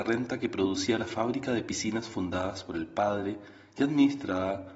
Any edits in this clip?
no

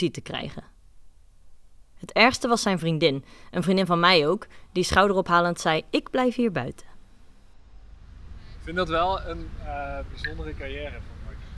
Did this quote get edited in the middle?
no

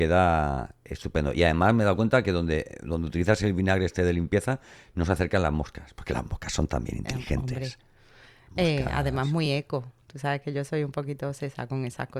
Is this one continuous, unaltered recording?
yes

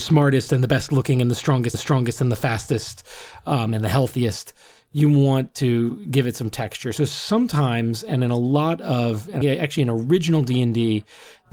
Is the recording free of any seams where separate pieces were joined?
no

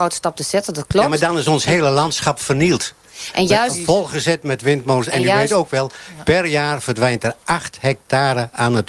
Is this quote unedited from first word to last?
yes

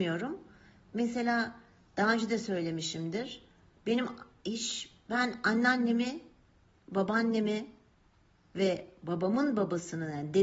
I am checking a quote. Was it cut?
no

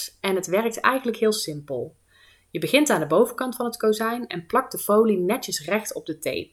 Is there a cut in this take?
no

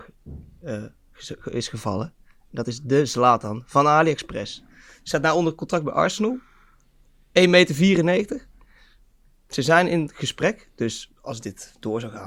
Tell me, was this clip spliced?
no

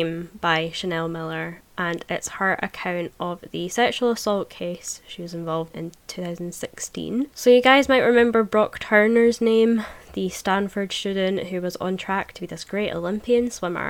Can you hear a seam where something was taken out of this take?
yes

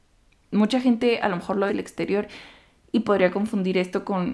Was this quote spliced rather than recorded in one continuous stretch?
yes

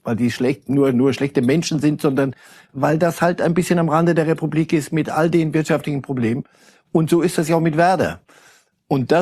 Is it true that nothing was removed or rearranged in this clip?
yes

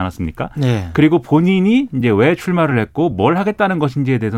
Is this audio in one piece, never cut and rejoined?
yes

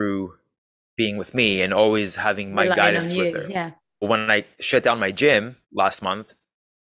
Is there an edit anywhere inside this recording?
yes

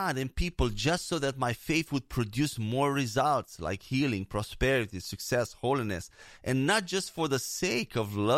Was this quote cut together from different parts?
no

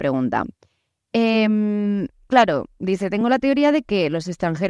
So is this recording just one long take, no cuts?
yes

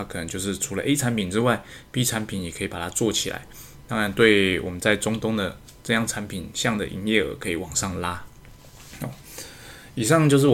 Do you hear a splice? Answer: no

